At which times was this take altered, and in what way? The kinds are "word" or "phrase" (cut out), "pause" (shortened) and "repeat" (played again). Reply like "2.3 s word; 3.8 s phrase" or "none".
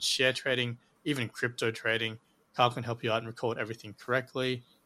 none